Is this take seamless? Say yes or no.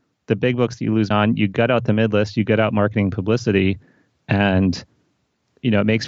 no